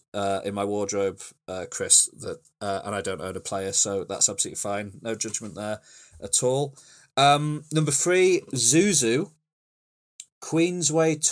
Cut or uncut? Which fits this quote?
uncut